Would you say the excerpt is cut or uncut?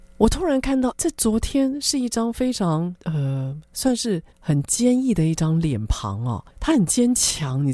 cut